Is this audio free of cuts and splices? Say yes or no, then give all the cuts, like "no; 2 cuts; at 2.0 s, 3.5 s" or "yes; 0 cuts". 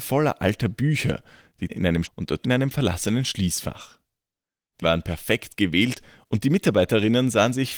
no; 4 cuts; at 1.7 s, 2.0 s, 2.4 s, 4.8 s